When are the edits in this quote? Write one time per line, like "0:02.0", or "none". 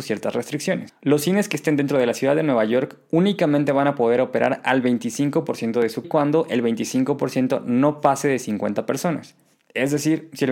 0:06.0